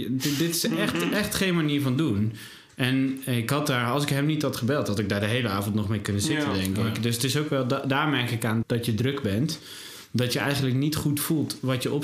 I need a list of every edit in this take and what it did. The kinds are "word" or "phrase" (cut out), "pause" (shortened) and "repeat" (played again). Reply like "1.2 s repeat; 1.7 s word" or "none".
8.6 s word